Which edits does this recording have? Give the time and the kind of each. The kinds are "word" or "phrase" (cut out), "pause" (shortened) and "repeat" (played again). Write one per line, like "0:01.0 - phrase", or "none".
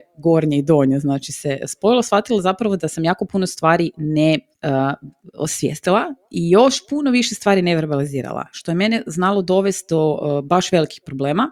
0:04.5 - pause